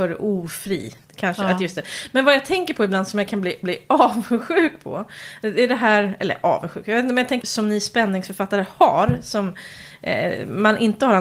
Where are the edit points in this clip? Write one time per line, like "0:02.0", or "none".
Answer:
0:01.0
0:03.6
0:07.4